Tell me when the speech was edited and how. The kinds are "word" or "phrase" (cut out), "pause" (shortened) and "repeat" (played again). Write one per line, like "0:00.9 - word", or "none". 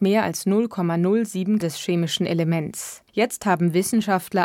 0:01.6 - word
0:03.1 - pause